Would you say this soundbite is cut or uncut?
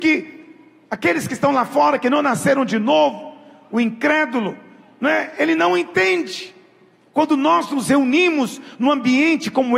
uncut